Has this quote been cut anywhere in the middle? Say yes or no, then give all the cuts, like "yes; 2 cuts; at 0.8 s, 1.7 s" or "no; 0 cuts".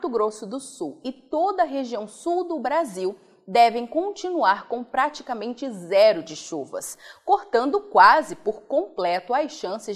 no; 0 cuts